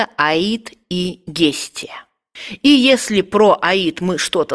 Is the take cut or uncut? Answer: uncut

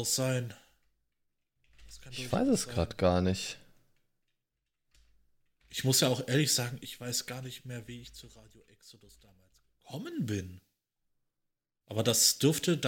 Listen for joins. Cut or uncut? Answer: uncut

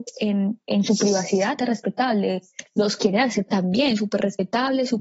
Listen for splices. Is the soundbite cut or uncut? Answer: cut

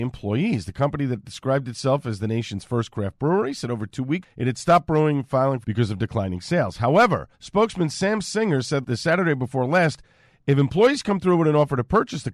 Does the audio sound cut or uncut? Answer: cut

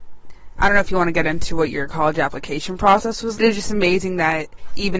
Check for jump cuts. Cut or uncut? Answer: cut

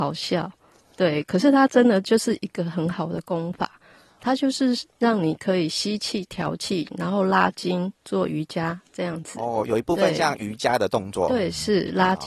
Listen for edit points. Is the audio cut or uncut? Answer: uncut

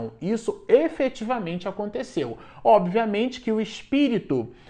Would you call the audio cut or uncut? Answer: uncut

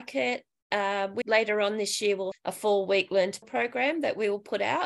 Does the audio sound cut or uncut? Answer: cut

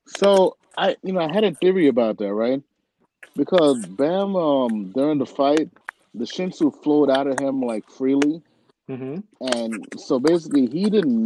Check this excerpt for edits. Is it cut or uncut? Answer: uncut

